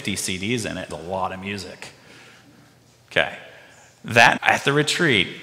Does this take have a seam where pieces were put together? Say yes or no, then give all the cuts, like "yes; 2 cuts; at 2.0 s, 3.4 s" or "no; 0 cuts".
yes; 2 cuts; at 0.9 s, 4.4 s